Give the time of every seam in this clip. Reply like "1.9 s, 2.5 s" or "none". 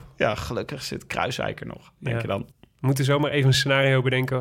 2.5 s